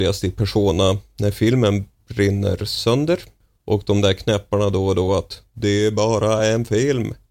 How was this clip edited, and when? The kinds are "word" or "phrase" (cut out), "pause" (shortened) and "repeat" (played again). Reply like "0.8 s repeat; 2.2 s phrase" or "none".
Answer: none